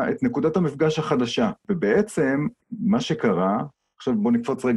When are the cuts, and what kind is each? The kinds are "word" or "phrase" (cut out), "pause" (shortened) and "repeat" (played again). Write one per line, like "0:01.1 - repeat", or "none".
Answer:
0:02.6 - pause